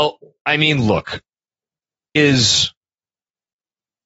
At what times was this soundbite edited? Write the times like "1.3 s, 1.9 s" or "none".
2.2 s